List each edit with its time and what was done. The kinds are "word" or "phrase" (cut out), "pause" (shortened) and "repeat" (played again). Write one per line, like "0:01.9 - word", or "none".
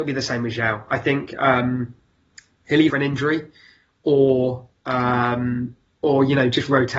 0:02.9 - word